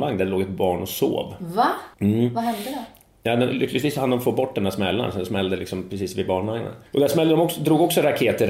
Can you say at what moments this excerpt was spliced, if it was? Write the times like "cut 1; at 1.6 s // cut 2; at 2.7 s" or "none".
cut 1; at 1.9 s // cut 2; at 6.9 s